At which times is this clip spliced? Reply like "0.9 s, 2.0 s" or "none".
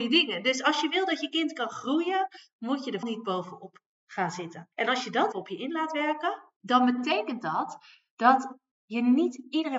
3.0 s, 4.7 s, 5.3 s, 6.6 s